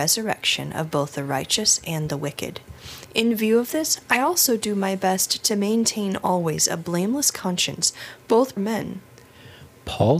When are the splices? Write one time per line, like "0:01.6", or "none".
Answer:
0:08.6

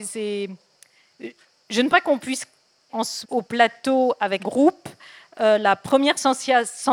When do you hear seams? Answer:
0:01.9
0:02.9
0:03.2
0:04.4

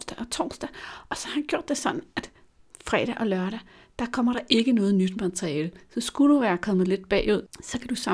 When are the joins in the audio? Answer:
none

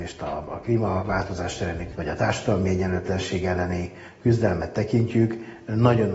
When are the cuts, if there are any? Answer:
0:01.9

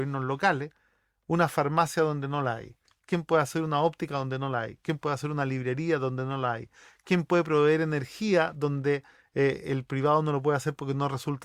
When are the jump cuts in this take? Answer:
none

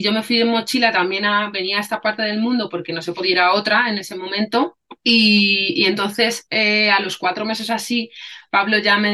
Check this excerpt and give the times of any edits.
0:05.0

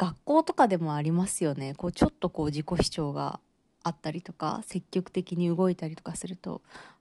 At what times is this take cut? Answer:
none

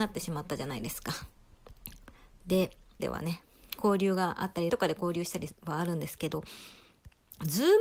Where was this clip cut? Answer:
0:03.0
0:04.7

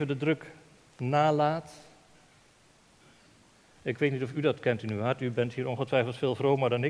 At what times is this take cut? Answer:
none

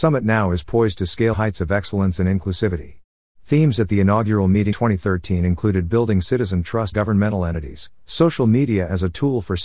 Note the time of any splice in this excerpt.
0:01.3
0:03.1
0:04.7
0:06.9

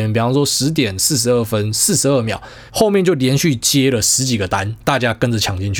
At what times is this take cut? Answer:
0:02.7

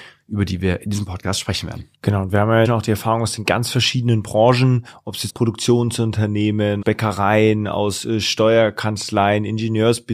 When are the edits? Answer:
0:01.9
0:02.6
0:05.3
0:06.8

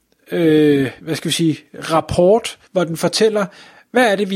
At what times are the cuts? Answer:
0:01.0
0:02.6

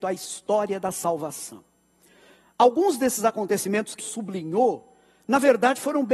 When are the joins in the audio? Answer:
0:04.0

